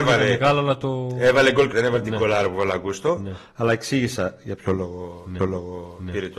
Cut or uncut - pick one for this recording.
cut